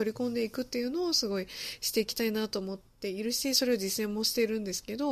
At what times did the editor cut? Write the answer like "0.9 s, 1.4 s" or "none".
2.9 s